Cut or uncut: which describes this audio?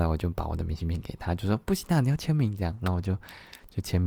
uncut